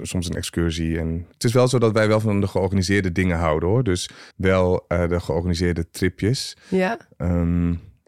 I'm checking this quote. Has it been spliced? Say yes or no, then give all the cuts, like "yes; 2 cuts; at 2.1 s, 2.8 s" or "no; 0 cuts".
yes; 1 cut; at 4.3 s